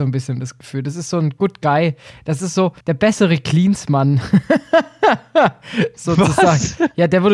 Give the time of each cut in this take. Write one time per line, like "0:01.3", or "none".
0:02.8